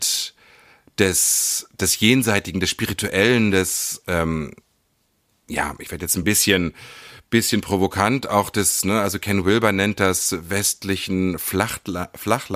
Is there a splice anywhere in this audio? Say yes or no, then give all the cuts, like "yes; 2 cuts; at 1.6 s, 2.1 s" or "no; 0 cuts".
no; 0 cuts